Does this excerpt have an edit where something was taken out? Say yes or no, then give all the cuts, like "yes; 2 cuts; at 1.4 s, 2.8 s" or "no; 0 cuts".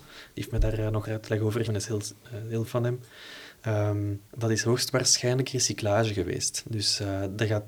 yes; 4 cuts; at 1.0 s, 1.7 s, 2.6 s, 4.3 s